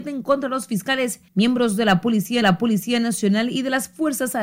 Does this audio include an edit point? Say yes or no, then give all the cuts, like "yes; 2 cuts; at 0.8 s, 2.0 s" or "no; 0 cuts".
yes; 2 cuts; at 1.3 s, 2.4 s